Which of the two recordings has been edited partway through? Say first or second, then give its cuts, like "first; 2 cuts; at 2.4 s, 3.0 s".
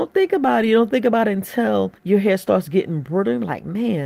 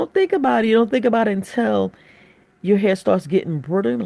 first; 1 cut; at 2.0 s